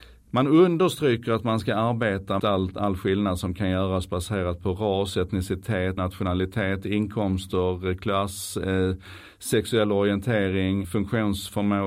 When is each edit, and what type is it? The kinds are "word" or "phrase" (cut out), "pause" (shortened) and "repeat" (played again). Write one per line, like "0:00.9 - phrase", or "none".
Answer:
0:02.4 - word
0:06.0 - word
0:10.8 - word